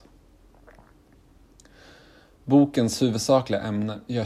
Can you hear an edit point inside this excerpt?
no; 0 cuts

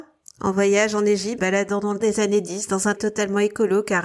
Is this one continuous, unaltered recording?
no; 3 cuts; at 1.4 s, 2.0 s, 3.0 s

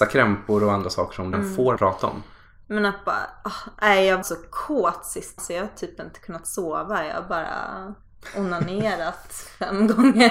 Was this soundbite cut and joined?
yes; 4 cuts; at 1.3 s, 1.8 s, 4.2 s, 5.4 s

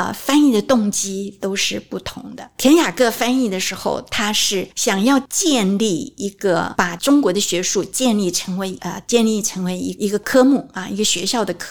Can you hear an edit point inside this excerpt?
yes; 1 cut; at 9.0 s

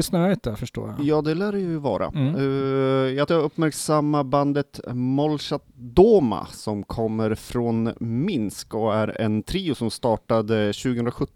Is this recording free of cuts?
no; 1 cut; at 3.3 s

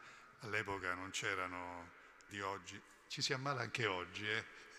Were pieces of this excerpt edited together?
yes; 1 cut; at 2.3 s

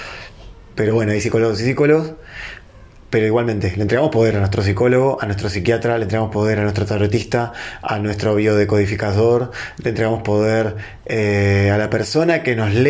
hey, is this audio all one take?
yes; 0 cuts

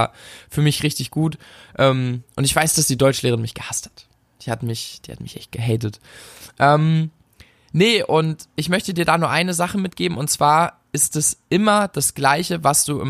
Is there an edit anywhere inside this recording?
no; 0 cuts

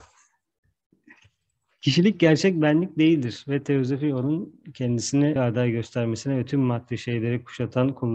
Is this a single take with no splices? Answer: no; 1 cut; at 5.4 s

